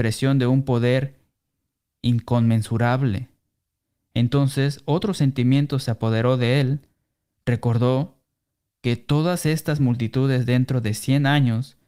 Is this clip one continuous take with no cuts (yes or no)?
yes